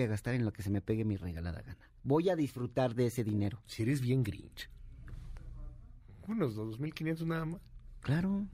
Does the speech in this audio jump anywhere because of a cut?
no; 0 cuts

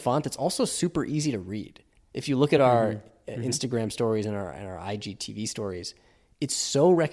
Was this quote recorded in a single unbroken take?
yes; 0 cuts

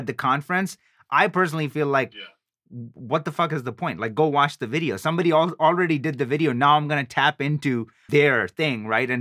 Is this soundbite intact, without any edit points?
no; 1 cut; at 8.1 s

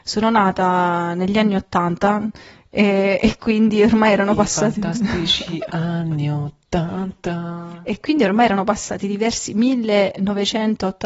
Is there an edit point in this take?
no; 0 cuts

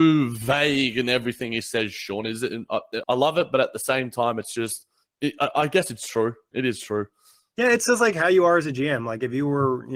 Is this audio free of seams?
no; 1 cut; at 3.0 s

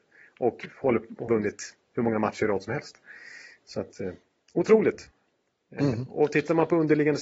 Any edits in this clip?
yes; 1 cut; at 1.3 s

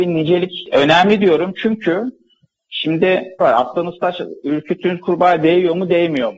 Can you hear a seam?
yes; 1 cut; at 3.4 s

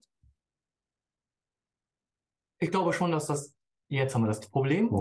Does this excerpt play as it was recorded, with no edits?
yes; 0 cuts

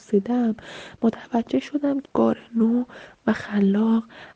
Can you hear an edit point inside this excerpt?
yes; 1 cut; at 2.0 s

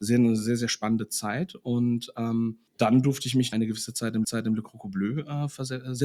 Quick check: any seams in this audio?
yes; 3 cuts; at 2.7 s, 3.5 s, 4.2 s

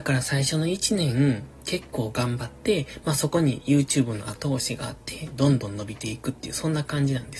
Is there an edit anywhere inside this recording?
no; 0 cuts

